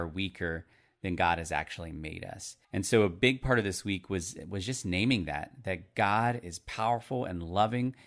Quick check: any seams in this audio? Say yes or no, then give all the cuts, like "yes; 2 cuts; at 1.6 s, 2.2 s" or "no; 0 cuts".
yes; 1 cut; at 2.6 s